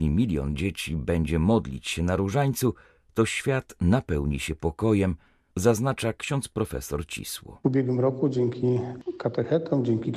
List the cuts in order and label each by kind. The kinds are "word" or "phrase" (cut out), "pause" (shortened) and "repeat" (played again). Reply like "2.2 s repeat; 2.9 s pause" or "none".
none